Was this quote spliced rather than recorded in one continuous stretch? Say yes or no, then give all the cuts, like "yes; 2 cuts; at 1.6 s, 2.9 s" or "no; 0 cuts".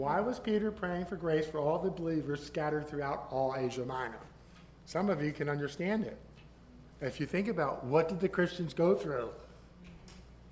no; 0 cuts